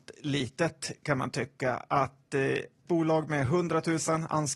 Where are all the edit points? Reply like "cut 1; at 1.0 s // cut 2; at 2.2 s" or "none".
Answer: cut 1; at 2.9 s